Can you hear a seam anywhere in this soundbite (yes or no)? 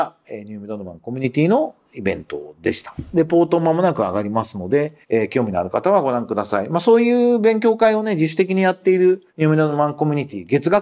yes